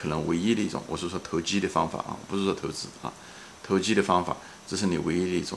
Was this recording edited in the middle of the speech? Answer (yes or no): no